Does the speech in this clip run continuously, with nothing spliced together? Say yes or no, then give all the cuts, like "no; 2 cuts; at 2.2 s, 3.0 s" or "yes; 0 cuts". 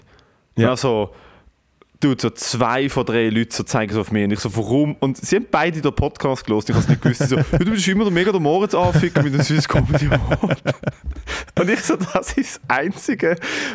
yes; 0 cuts